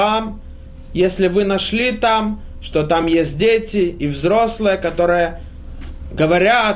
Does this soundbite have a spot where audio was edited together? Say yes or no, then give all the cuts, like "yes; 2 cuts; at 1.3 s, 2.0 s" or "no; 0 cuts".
no; 0 cuts